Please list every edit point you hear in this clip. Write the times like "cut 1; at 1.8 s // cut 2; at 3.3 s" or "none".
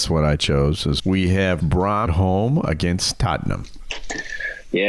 cut 1; at 1.0 s // cut 2; at 1.6 s // cut 3; at 2.1 s

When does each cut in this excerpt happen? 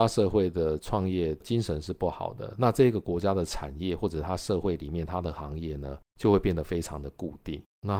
cut 1; at 6.1 s

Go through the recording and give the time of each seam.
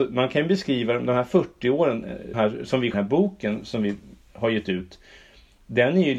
cut 1; at 2.3 s // cut 2; at 2.9 s

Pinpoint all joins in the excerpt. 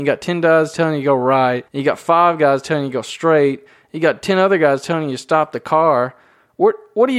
cut 1; at 1.7 s

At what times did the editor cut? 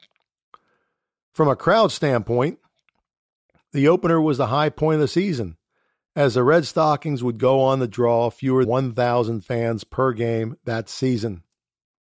cut 1; at 8.6 s

